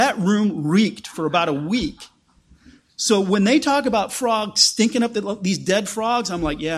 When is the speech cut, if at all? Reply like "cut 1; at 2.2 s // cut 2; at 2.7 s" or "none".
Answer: none